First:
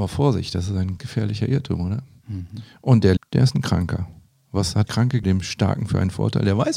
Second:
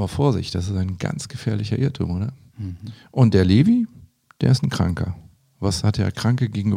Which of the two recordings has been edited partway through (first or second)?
first